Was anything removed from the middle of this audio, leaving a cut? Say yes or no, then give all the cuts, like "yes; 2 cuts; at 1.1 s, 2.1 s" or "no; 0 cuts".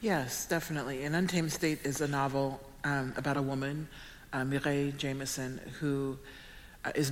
yes; 1 cut; at 3.3 s